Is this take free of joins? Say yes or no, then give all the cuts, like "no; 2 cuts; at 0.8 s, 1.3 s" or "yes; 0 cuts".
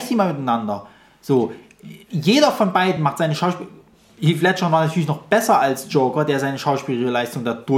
yes; 0 cuts